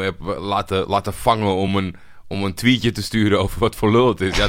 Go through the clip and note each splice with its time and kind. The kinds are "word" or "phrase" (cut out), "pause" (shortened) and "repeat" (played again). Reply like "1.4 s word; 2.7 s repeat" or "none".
none